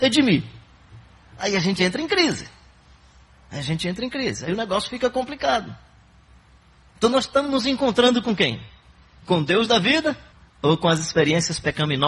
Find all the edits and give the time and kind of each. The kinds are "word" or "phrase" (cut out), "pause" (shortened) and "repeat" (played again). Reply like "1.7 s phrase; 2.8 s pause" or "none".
10.3 s pause